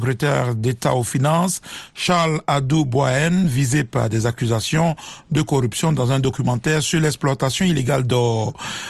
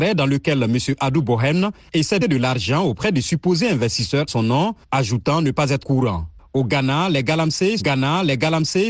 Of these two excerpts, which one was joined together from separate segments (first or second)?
second